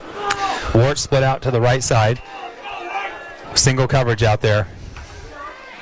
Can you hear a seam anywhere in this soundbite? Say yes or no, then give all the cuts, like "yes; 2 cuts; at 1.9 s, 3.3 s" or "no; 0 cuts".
no; 0 cuts